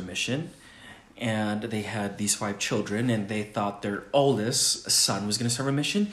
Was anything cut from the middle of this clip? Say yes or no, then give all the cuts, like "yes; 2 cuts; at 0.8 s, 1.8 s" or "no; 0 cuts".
no; 0 cuts